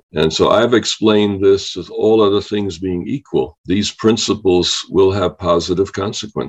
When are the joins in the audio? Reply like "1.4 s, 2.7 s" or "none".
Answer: none